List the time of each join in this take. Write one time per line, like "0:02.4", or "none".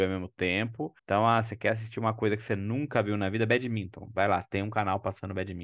0:01.0